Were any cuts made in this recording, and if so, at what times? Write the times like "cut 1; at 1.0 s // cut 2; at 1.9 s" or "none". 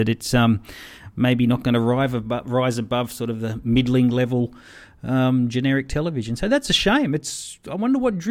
none

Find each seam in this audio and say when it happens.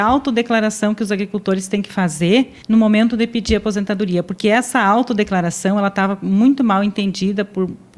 cut 1; at 2.6 s

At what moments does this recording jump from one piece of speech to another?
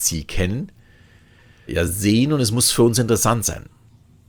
cut 1; at 1.7 s

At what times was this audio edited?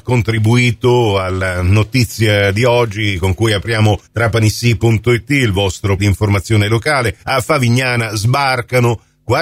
cut 1; at 4.0 s // cut 2; at 6.0 s // cut 3; at 7.2 s

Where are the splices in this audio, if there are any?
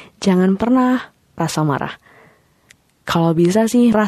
cut 1; at 1.4 s

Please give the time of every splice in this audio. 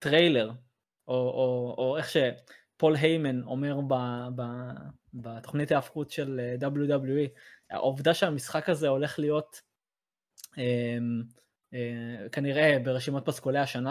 none

